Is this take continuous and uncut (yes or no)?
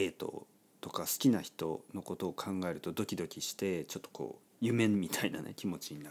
no